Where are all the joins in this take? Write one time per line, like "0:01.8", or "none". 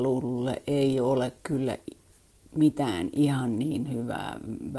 none